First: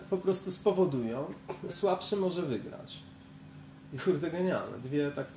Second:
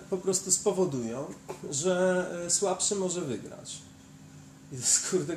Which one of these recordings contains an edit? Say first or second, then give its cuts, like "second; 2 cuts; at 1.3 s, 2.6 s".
first; 2 cuts; at 1.7 s, 4.0 s